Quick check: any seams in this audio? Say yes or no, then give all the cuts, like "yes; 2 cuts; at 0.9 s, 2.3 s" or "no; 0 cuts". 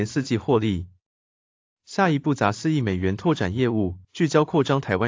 yes; 1 cut; at 4.0 s